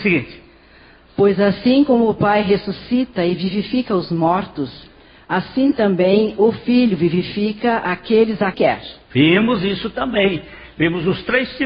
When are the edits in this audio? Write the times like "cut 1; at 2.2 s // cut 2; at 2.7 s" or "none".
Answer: cut 1; at 8.5 s